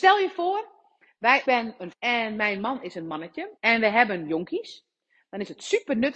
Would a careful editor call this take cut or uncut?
cut